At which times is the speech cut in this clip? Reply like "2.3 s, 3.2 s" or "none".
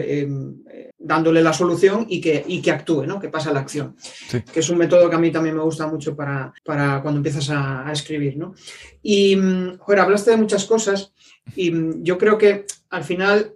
0.9 s, 6.6 s